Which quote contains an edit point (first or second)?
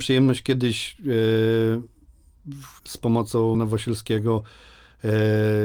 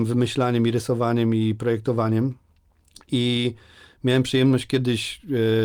first